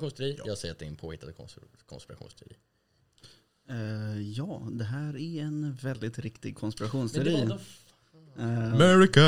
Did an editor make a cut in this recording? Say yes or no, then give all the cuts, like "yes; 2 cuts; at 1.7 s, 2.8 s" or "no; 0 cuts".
no; 0 cuts